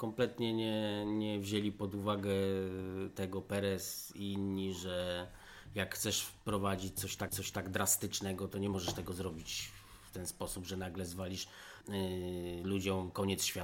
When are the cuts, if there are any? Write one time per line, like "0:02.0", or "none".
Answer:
0:07.3
0:11.8